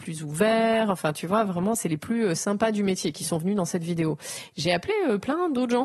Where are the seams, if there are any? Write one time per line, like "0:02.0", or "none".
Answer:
none